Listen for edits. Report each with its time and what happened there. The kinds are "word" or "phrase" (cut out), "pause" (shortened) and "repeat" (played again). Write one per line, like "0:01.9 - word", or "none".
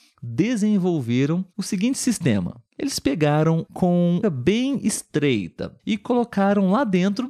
0:01.5 - pause
0:02.7 - pause
0:03.6 - phrase
0:04.2 - phrase
0:05.8 - pause